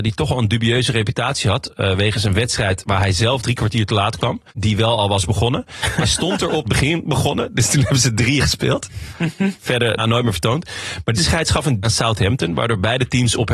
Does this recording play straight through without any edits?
no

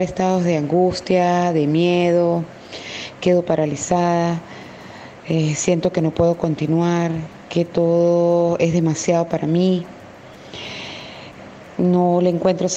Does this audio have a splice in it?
no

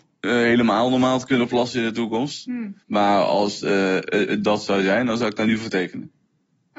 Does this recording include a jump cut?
yes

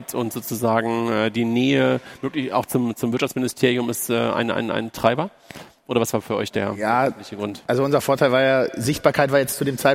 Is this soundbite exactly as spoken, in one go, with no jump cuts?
yes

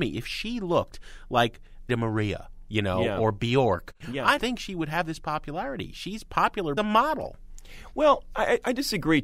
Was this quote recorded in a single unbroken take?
no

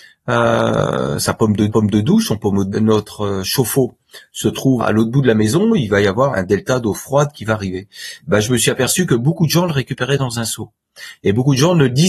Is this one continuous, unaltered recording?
no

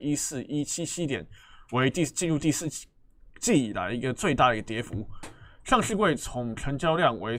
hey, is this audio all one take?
yes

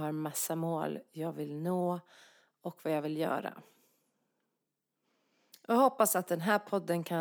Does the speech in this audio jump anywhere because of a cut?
no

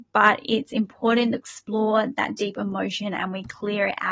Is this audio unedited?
no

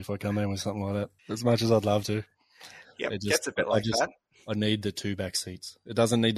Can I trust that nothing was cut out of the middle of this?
no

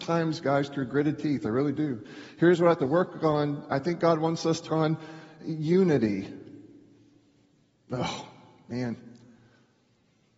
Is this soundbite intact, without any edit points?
no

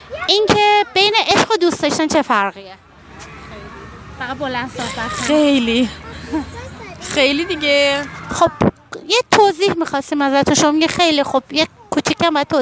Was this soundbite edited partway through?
no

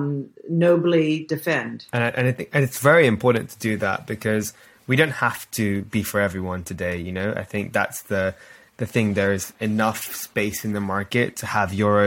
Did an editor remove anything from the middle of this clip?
no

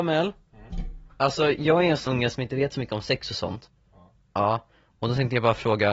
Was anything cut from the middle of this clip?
yes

